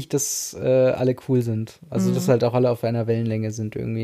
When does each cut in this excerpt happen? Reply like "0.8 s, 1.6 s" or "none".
none